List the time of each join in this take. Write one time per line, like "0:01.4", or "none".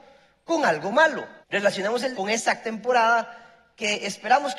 0:01.4
0:02.1
0:02.6